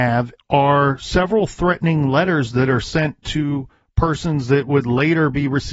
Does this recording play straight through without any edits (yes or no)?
yes